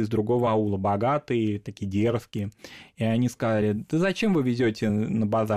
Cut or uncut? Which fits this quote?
uncut